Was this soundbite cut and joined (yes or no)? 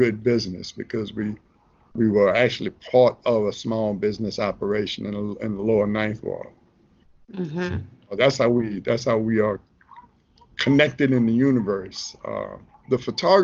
no